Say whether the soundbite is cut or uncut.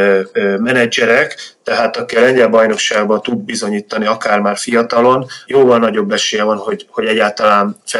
cut